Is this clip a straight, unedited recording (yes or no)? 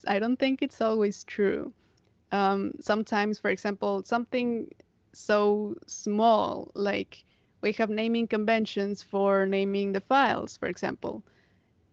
yes